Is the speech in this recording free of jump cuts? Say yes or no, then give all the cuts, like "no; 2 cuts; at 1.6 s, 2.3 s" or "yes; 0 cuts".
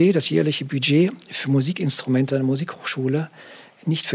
no; 1 cut; at 2.3 s